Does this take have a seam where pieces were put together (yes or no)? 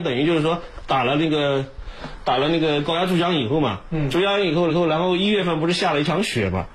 yes